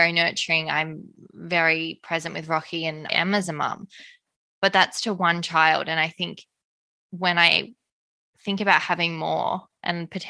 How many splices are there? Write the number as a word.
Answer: one